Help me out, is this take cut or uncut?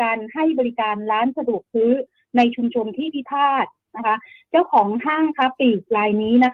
uncut